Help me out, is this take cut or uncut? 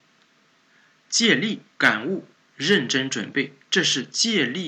cut